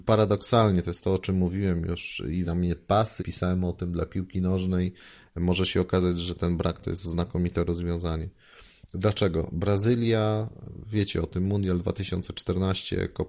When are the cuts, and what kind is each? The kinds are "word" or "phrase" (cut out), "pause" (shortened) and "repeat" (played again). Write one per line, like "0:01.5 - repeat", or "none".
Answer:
0:02.5 - word
0:03.2 - word
0:06.8 - word